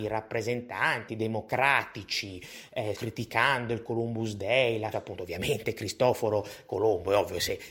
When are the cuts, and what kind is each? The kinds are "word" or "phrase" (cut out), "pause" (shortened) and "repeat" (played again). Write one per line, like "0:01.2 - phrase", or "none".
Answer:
0:01.1 - word
0:02.9 - word
0:04.9 - phrase